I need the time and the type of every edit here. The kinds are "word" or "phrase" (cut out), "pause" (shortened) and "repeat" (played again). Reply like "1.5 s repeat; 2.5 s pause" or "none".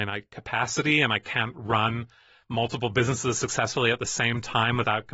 none